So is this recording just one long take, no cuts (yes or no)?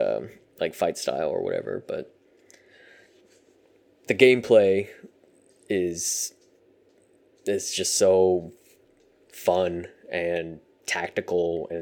yes